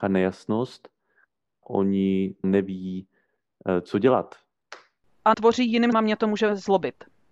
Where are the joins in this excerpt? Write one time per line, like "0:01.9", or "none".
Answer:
0:01.6
0:02.4
0:05.3
0:05.9

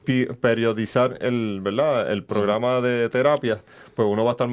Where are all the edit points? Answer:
none

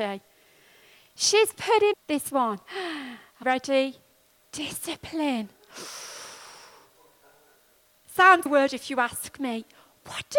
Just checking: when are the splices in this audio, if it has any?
0:01.9
0:02.3
0:03.4
0:08.5

